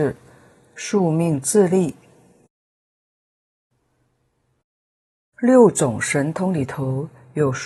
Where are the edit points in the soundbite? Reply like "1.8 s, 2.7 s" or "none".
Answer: none